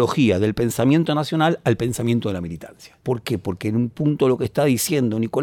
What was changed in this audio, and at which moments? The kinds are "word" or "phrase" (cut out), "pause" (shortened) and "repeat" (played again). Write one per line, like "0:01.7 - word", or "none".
none